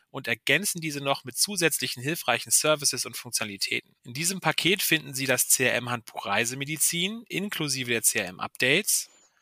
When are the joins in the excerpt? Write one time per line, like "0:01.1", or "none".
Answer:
0:04.0